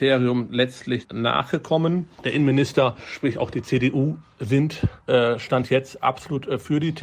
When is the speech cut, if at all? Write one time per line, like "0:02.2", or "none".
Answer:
0:01.0